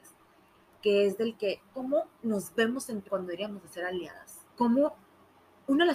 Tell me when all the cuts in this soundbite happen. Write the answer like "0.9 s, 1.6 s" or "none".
1.7 s, 3.1 s, 4.5 s